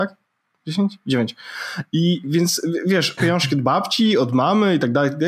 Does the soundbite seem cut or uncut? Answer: cut